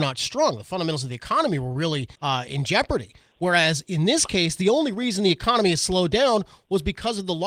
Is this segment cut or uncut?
cut